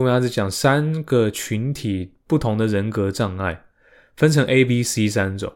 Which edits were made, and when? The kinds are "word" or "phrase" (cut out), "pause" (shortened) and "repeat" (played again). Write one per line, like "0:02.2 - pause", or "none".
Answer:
none

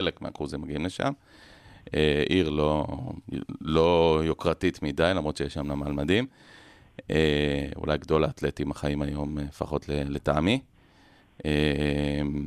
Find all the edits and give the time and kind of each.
none

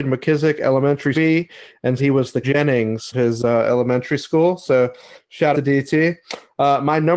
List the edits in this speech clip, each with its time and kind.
0:01.1 - word
0:02.0 - word
0:02.4 - word
0:03.1 - word
0:05.5 - word

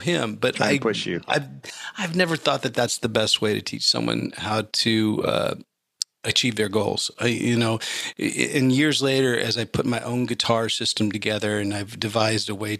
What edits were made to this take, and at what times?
none

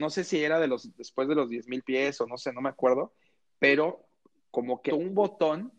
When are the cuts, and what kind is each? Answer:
0:04.9 - word

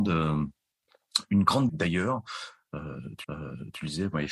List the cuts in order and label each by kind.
0:01.7 - word
0:03.2 - repeat

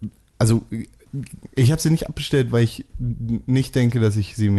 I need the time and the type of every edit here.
none

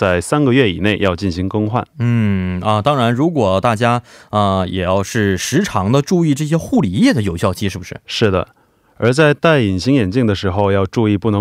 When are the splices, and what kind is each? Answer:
none

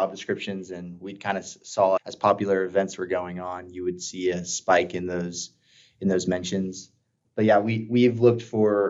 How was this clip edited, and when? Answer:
none

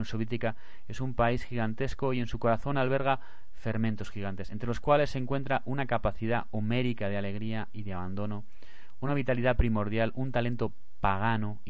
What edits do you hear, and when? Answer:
none

